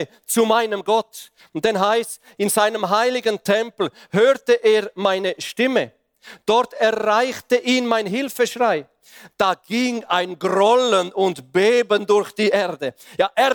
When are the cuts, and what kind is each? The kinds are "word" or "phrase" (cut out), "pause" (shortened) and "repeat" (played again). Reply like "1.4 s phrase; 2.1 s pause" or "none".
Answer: none